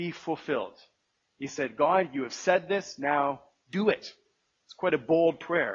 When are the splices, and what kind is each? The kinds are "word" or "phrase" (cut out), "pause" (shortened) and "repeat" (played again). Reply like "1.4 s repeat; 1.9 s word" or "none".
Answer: none